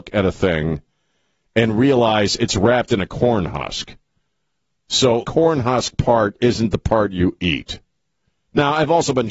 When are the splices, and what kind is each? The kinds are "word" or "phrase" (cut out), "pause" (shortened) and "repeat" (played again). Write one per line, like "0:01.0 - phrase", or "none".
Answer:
0:05.2 - word